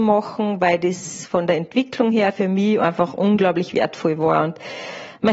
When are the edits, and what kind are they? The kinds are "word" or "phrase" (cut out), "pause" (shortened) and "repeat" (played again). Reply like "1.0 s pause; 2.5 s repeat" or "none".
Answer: none